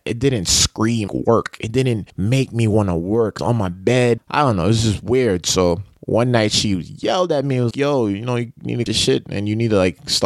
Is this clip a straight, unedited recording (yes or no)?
no